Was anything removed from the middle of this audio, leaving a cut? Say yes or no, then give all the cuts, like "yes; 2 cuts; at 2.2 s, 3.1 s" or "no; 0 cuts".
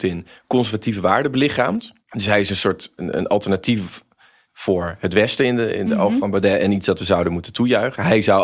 yes; 2 cuts; at 2.0 s, 3.0 s